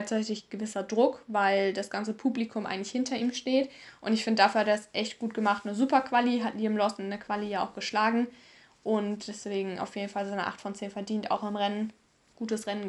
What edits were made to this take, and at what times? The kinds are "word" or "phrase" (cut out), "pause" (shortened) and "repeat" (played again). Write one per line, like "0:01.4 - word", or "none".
none